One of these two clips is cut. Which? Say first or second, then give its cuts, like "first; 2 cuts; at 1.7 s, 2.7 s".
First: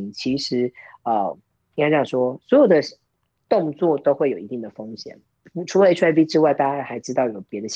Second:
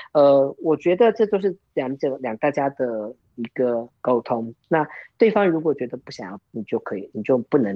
second; 3 cuts; at 4.0 s, 4.6 s, 6.4 s